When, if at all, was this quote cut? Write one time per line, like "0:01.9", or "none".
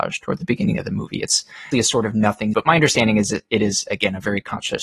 0:01.7
0:02.5